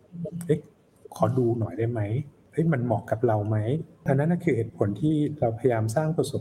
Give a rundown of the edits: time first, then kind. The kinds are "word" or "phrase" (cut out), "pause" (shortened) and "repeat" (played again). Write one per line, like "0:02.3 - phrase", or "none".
none